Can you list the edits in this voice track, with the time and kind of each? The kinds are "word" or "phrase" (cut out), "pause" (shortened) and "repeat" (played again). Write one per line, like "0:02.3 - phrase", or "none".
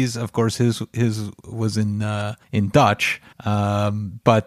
0:02.4 - pause
0:03.3 - pause